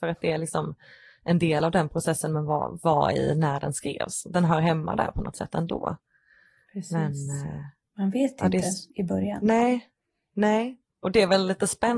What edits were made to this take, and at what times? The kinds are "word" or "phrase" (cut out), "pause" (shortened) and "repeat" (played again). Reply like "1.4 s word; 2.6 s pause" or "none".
none